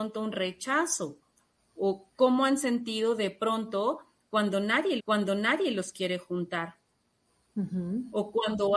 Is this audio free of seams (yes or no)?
no